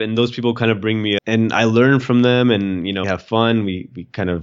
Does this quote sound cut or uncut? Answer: cut